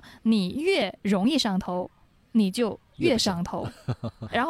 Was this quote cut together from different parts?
no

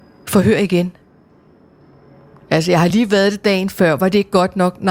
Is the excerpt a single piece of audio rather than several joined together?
yes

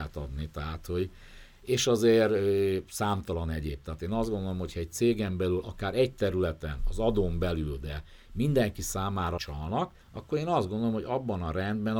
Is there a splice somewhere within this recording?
yes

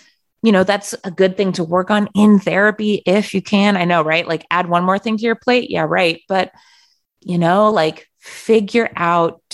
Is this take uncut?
yes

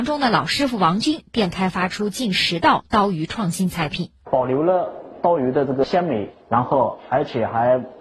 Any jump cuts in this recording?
yes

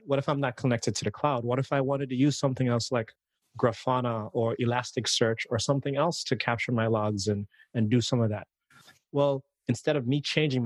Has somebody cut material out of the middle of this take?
no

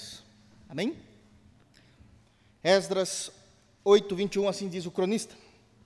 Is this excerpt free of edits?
yes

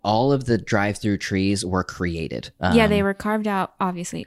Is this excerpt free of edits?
yes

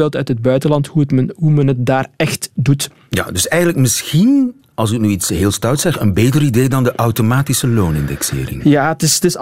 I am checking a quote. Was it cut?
no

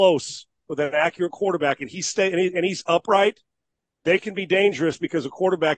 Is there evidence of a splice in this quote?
no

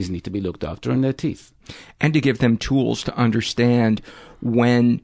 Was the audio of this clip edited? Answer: no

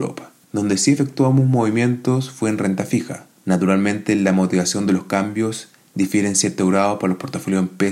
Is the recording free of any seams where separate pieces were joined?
yes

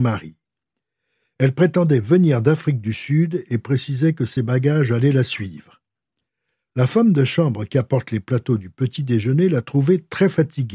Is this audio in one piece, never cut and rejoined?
yes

